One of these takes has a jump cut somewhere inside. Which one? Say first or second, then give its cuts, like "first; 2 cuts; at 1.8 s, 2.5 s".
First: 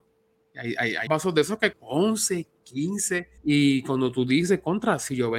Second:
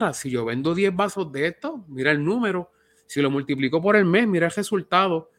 first; 3 cuts; at 1.1 s, 1.7 s, 3.4 s